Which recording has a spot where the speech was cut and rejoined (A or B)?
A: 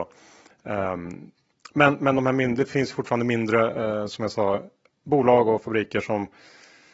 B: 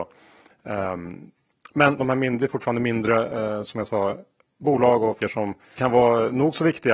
B